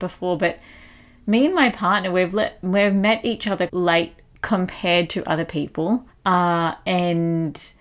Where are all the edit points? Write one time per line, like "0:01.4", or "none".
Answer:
0:03.7
0:06.1